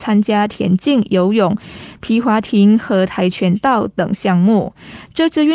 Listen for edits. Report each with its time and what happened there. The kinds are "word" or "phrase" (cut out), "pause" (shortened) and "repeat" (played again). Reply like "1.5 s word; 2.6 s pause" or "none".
none